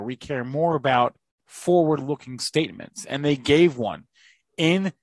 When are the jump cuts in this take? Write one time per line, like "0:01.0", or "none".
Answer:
0:01.2